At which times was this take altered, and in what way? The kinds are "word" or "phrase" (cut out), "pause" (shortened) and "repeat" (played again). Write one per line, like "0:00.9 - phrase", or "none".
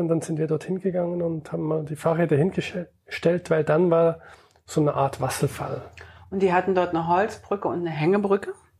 none